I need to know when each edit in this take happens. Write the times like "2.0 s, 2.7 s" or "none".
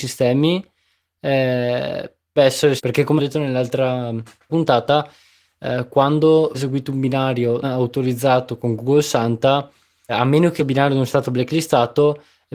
2.4 s, 2.8 s, 3.2 s, 4.5 s, 6.5 s, 7.6 s, 10.1 s, 10.6 s, 11.1 s

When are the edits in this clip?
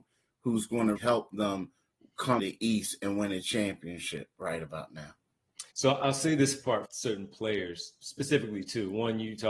1.0 s, 2.4 s, 5.7 s, 6.8 s

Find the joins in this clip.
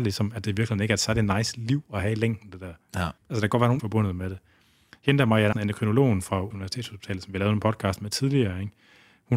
3.2 s, 3.8 s, 5.5 s, 6.5 s

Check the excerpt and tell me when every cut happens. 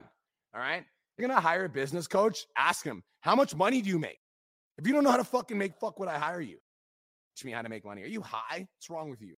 1.2 s, 5.7 s, 7.4 s

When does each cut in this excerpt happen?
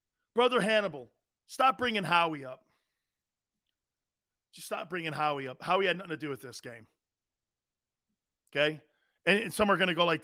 none

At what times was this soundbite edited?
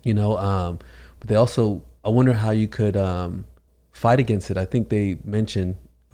3.7 s

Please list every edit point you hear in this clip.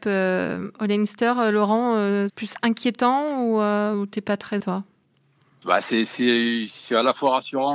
2.3 s, 4.6 s, 5.6 s

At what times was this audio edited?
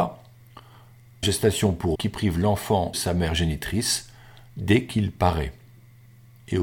1.2 s, 1.9 s, 2.9 s

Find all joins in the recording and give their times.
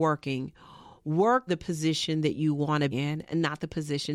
1.5 s, 2.9 s

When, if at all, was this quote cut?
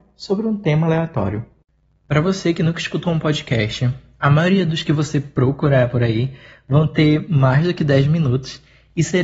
none

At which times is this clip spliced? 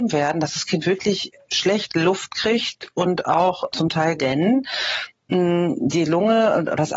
3.7 s, 4.2 s

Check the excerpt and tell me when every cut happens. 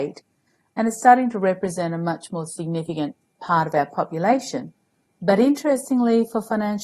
none

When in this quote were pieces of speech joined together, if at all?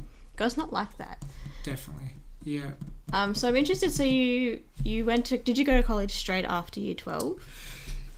none

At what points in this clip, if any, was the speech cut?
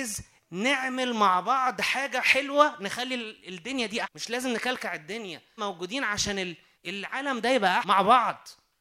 4.0 s, 5.6 s, 6.7 s, 7.8 s

